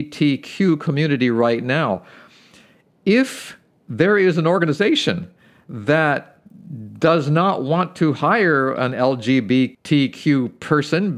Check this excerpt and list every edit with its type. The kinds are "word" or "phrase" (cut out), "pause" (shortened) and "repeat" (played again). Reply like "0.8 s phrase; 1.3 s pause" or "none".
none